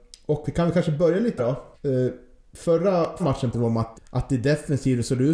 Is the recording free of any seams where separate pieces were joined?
no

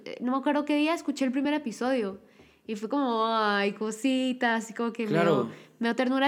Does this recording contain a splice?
no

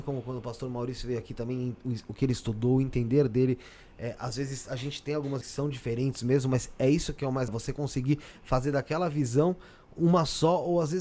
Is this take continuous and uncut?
no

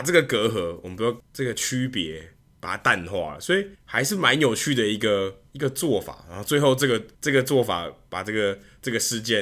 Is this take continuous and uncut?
no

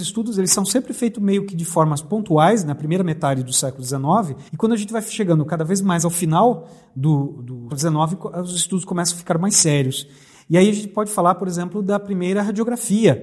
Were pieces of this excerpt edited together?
yes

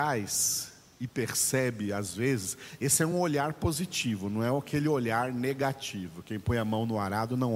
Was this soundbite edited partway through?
no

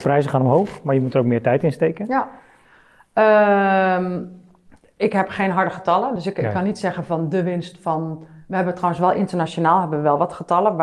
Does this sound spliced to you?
no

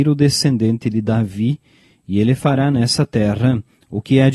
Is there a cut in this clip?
no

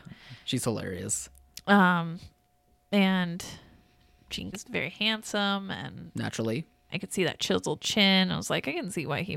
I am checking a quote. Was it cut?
yes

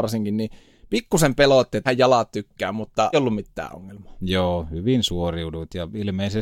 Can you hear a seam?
yes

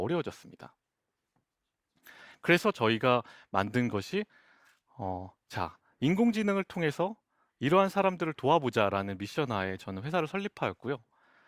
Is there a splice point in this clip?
no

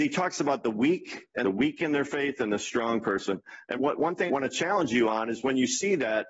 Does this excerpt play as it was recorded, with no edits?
no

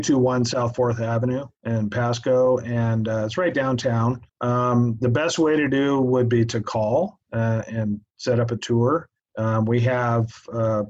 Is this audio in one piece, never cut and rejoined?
no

